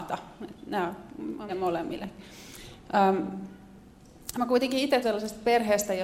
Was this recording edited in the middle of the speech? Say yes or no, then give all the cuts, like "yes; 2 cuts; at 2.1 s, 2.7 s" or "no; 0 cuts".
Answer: yes; 2 cuts; at 1.5 s, 5.0 s